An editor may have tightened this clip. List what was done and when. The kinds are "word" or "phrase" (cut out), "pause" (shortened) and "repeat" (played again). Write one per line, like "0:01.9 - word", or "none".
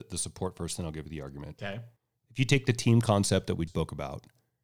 0:02.0 - pause
0:03.7 - word